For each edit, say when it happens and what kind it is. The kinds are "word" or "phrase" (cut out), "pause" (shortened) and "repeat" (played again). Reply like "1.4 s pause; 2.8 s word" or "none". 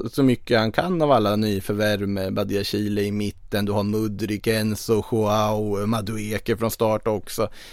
none